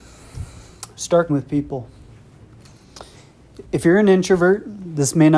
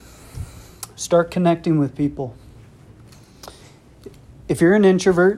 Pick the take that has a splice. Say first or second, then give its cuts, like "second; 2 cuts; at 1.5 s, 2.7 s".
first; 2 cuts; at 1.3 s, 3.6 s